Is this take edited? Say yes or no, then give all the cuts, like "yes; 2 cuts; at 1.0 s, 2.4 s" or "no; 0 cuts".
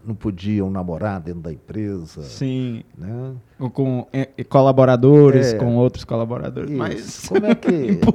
no; 0 cuts